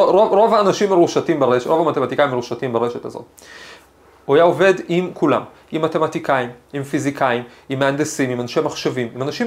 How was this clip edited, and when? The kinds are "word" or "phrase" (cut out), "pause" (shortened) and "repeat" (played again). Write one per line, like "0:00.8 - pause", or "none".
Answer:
none